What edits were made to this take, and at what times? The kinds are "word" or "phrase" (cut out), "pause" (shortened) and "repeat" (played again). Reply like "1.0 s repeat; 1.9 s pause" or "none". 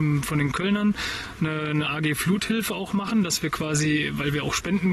none